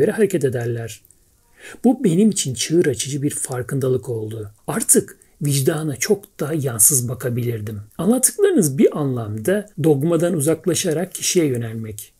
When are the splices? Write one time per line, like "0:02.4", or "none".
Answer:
0:04.6
0:07.9
0:09.7